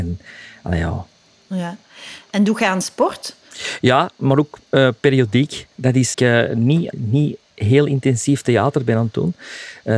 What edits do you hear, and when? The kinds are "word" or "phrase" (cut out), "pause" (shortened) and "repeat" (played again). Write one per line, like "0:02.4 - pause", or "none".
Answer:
0:05.7 - pause
0:06.1 - phrase
0:06.9 - word